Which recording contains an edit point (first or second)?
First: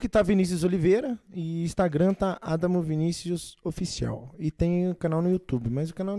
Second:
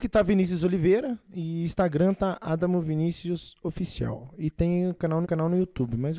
second